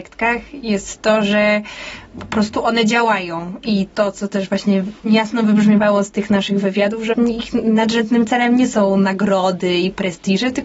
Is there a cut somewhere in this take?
yes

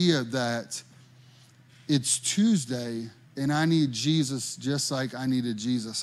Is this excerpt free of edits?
no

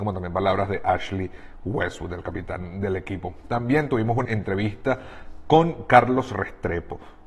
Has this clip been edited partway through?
yes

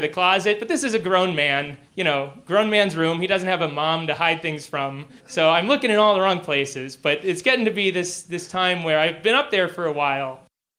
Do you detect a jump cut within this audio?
yes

